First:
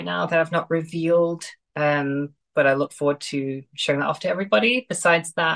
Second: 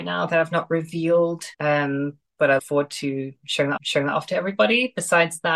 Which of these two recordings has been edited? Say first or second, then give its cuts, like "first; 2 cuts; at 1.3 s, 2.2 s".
second; 3 cuts; at 1.5 s, 2.6 s, 3.8 s